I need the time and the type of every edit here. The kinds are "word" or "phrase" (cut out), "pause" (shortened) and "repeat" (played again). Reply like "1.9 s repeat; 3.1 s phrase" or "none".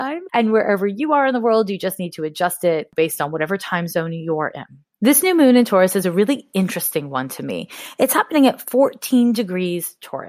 none